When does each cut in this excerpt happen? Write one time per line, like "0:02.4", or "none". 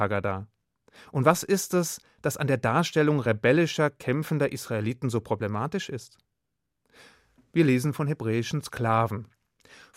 none